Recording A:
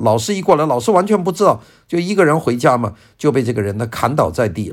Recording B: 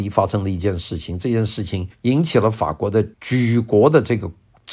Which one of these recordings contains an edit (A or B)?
B